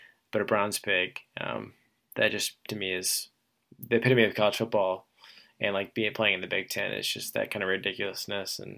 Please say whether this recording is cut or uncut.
uncut